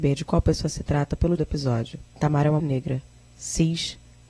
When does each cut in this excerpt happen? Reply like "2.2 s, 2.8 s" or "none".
1.4 s, 2.1 s, 2.6 s